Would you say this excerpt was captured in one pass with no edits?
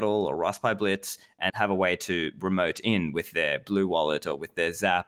no; 1 cut; at 1.5 s

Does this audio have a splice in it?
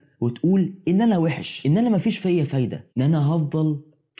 yes; 1 cut; at 2.9 s

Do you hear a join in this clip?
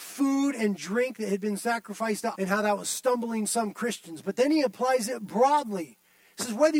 yes; 1 cut; at 2.3 s

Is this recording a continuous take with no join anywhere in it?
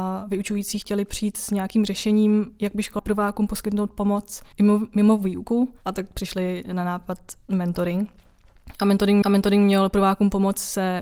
no; 4 cuts; at 3.0 s, 4.5 s, 7.4 s, 9.2 s

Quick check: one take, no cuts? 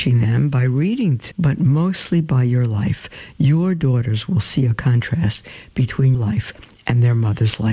no; 2 cuts; at 1.3 s, 6.1 s

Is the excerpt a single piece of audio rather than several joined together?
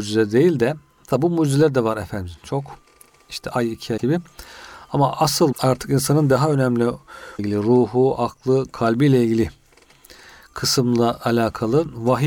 no; 3 cuts; at 4.0 s, 5.5 s, 7.4 s

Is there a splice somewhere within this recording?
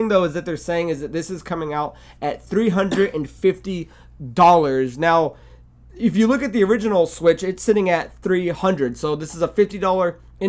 no; 0 cuts

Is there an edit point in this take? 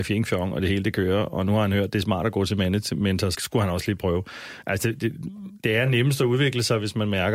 yes; 1 cut; at 3.3 s

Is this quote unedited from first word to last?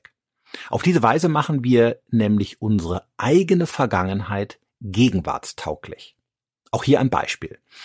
yes; 0 cuts

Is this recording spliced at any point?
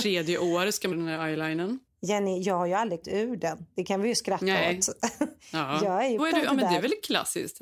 yes; 3 cuts; at 0.9 s, 3.0 s, 6.2 s

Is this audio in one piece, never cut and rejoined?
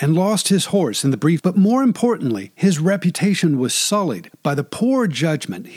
no; 1 cut; at 1.4 s

